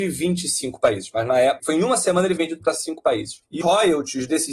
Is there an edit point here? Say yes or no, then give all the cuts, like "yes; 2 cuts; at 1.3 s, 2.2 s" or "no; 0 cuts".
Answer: yes; 3 cuts; at 1.6 s, 2.4 s, 3.6 s